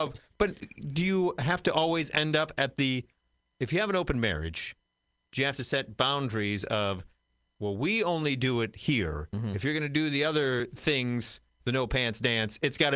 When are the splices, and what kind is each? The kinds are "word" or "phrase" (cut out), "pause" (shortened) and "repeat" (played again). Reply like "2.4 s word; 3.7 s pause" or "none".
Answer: none